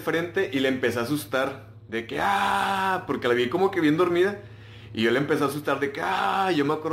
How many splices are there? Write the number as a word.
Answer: zero